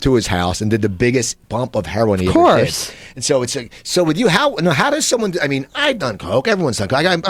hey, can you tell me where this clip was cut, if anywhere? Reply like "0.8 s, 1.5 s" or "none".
1.4 s